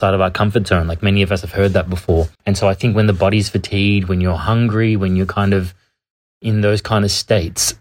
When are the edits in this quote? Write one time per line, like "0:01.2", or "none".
0:02.3